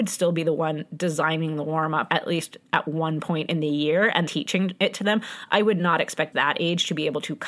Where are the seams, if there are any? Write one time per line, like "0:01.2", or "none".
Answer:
0:02.1
0:04.3
0:06.3